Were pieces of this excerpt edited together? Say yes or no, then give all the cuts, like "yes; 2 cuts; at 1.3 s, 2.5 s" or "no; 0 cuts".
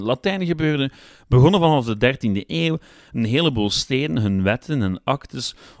no; 0 cuts